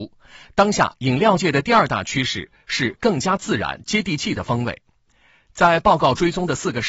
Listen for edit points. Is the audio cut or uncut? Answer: uncut